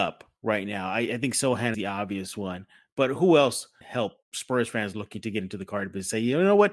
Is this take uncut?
no; 3 cuts; at 1.7 s, 3.8 s, 4.2 s

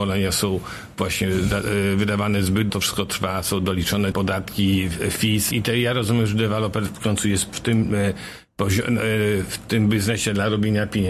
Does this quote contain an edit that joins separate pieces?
yes; 3 cuts; at 2.7 s, 4.1 s, 5.5 s

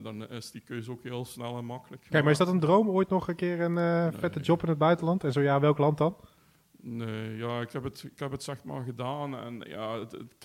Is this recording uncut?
yes; 0 cuts

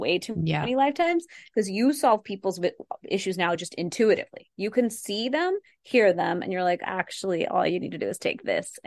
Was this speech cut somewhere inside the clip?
no; 0 cuts

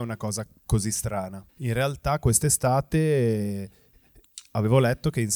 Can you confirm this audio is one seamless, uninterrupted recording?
no; 1 cut; at 1.5 s

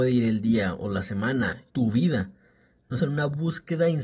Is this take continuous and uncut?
no; 2 cuts; at 1.7 s, 3.0 s

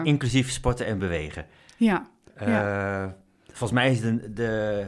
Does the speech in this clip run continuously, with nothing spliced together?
yes; 0 cuts

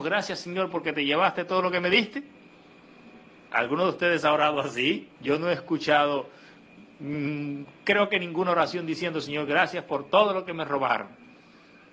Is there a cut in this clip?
yes; 2 cuts; at 3.3 s, 5.1 s

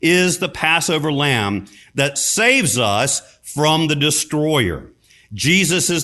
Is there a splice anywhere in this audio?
no; 0 cuts

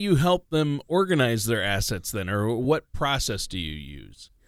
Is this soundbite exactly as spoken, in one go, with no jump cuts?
yes; 0 cuts

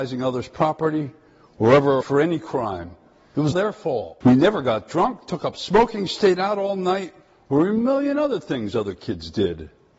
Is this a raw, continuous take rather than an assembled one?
no; 3 cuts; at 2.0 s, 3.5 s, 4.2 s

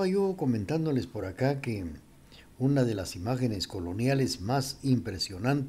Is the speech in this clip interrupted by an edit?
no; 0 cuts

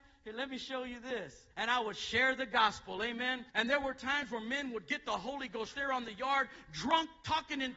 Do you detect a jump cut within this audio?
yes; 3 cuts; at 1.5 s, 3.5 s, 5.7 s

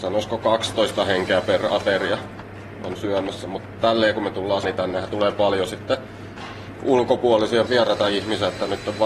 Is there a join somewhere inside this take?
yes; 2 cuts; at 4.6 s, 7.7 s

